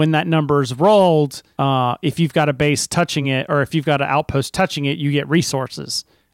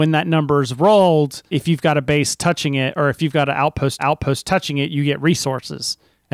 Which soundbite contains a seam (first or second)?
second